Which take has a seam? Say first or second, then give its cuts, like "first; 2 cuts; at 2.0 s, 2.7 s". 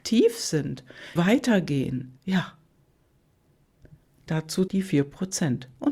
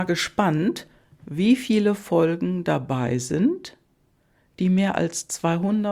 first; 3 cuts; at 1.2 s, 2.2 s, 4.7 s